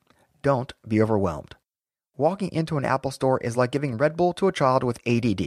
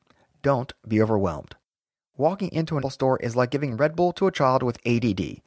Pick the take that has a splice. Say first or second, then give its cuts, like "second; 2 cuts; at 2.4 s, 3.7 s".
second; 1 cut; at 2.8 s